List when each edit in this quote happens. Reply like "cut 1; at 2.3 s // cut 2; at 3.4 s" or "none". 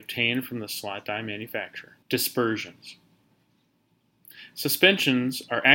cut 1; at 2.0 s